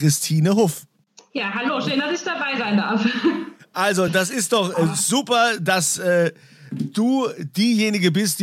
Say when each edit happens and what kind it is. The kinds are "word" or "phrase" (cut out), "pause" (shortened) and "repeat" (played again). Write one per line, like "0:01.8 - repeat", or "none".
none